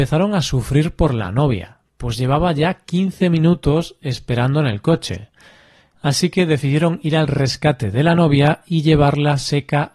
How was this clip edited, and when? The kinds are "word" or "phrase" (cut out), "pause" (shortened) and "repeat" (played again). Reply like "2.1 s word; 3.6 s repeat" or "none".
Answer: none